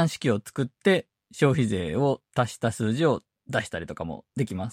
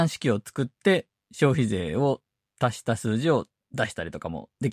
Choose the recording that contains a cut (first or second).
first